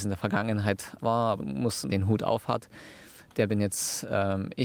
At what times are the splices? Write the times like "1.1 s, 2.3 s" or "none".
1.0 s, 1.4 s, 1.9 s